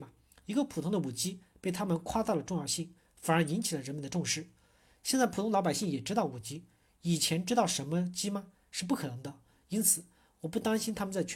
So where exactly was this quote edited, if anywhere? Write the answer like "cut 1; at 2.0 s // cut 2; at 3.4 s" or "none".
none